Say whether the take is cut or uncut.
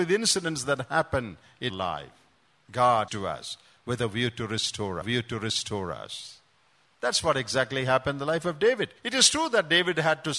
cut